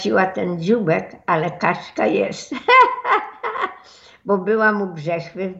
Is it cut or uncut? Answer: uncut